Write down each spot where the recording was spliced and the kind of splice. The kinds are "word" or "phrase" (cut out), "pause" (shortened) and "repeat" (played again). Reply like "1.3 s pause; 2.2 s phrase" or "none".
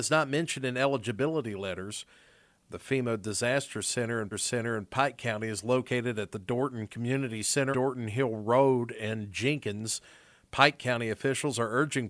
4.3 s repeat; 7.7 s word